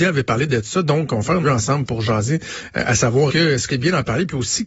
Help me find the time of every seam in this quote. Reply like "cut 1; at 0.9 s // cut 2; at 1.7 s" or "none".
cut 1; at 1.4 s // cut 2; at 3.3 s // cut 3; at 3.7 s